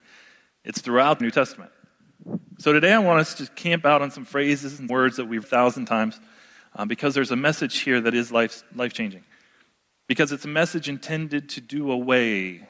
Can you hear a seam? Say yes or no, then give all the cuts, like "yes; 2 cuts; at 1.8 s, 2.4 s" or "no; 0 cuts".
yes; 3 cuts; at 1.2 s, 4.9 s, 5.4 s